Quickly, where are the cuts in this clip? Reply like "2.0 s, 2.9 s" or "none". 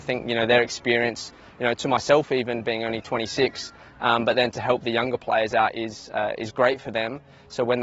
none